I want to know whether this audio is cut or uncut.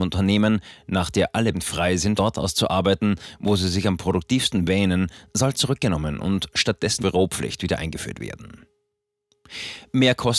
cut